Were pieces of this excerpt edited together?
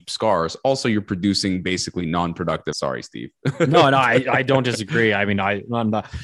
yes; 1 cut; at 2.7 s

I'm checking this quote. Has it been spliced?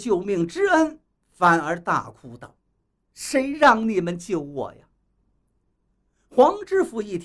no; 0 cuts

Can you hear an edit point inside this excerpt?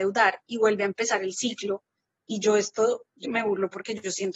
yes; 1 cut; at 3.2 s

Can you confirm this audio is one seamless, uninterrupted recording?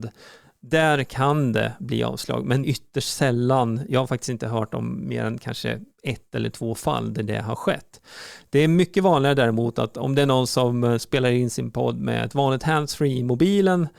no; 1 cut; at 2.6 s

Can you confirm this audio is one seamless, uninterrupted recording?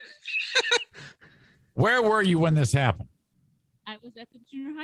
yes; 0 cuts

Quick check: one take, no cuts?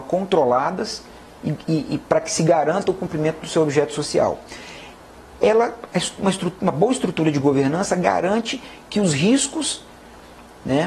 yes; 0 cuts

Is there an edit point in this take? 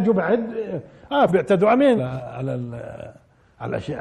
yes; 2 cuts; at 1.3 s, 2.0 s

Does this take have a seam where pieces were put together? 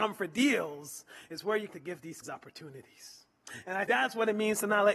yes; 3 cuts; at 1.7 s, 2.2 s, 3.9 s

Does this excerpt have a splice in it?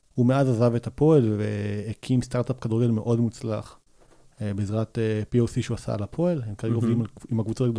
no; 0 cuts

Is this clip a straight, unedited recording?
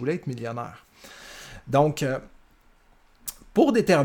yes; 0 cuts

